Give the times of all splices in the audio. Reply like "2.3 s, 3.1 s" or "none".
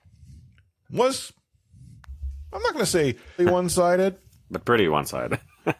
3.4 s